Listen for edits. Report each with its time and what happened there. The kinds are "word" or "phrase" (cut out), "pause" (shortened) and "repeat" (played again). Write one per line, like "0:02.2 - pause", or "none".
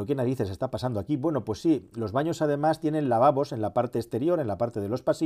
none

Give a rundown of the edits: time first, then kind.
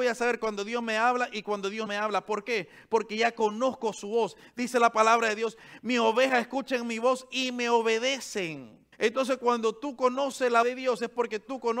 0:01.9 - word
0:08.9 - pause
0:10.6 - word

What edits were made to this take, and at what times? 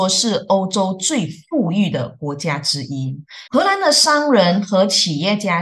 0:03.5 - pause

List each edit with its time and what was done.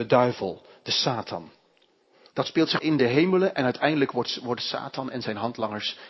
0:02.8 - word

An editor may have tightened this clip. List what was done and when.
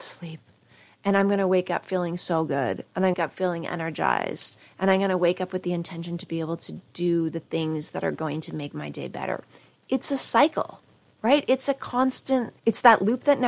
0:03.1 - phrase
0:12.6 - pause

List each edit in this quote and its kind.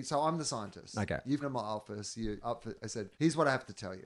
0:01.4 - word
0:02.4 - word
0:03.1 - pause

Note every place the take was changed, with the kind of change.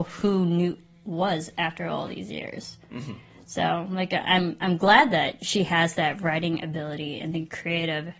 none

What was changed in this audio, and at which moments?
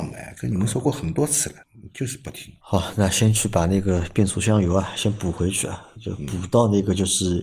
0:01.6 - pause
0:02.6 - pause

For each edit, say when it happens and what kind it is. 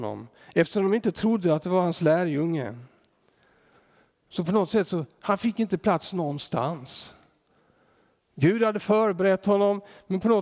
none

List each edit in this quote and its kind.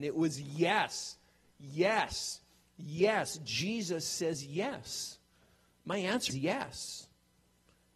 0:06.3 - word

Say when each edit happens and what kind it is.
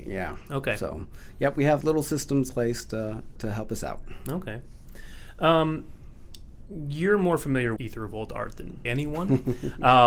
0:01.8 - word
0:02.5 - word
0:03.4 - word
0:06.6 - word
0:07.8 - word
0:08.9 - word

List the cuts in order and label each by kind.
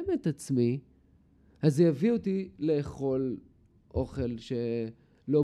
none

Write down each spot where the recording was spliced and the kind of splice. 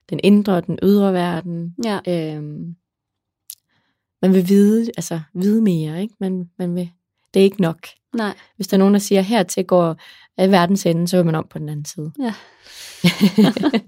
none

